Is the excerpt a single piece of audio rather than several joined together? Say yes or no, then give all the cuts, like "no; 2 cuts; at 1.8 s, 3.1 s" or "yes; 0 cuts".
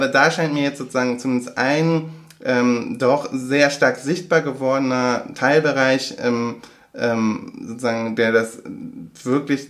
yes; 0 cuts